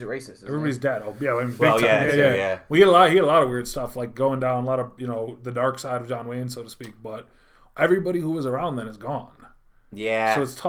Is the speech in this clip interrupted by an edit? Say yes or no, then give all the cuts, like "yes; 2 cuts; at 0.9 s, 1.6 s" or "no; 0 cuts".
no; 0 cuts